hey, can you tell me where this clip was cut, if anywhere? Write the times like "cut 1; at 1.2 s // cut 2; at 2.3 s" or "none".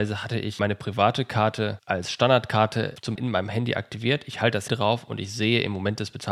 cut 1; at 3.2 s // cut 2; at 4.7 s